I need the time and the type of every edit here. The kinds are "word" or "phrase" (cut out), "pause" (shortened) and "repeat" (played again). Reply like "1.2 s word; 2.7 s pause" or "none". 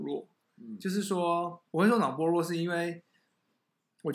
1.7 s pause